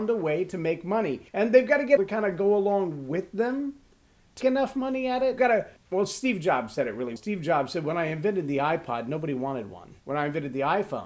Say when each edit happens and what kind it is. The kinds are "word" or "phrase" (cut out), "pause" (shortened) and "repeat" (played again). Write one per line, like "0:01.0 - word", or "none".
0:01.3 - pause
0:02.0 - phrase
0:04.4 - word
0:05.4 - word
0:05.8 - pause
0:07.2 - word
0:10.0 - pause